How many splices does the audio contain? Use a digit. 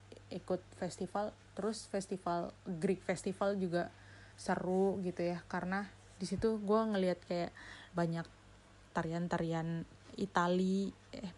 2